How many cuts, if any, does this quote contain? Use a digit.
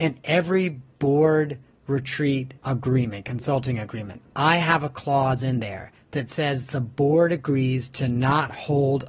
2